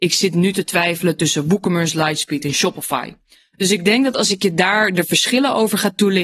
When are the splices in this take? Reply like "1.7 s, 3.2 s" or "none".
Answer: none